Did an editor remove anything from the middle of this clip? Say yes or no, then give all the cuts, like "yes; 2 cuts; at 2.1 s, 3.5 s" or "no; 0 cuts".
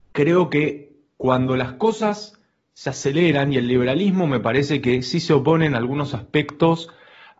no; 0 cuts